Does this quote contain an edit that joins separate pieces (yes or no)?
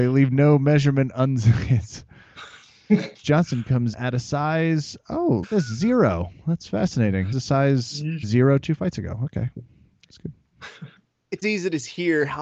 yes